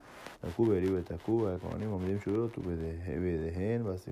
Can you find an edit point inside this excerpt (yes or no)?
yes